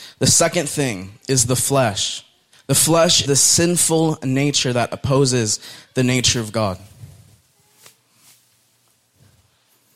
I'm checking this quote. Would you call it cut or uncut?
cut